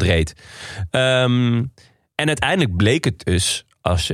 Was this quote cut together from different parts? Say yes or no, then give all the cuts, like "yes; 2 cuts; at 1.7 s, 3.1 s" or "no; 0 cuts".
no; 0 cuts